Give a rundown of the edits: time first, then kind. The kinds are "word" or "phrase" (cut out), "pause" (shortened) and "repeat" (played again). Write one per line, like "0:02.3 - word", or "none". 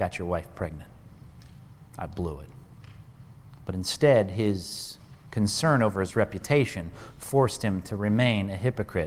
none